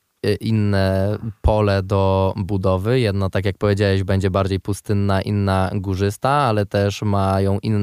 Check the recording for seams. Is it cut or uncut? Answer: uncut